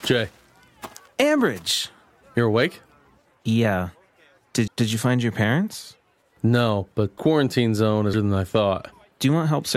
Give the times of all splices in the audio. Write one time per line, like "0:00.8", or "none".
0:04.7
0:07.2
0:08.1